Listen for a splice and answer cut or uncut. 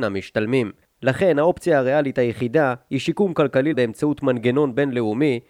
cut